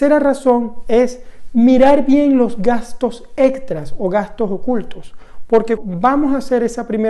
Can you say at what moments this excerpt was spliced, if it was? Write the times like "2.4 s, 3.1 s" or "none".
5.8 s